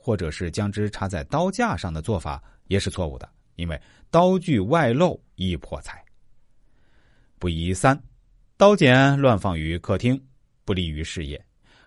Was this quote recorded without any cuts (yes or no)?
yes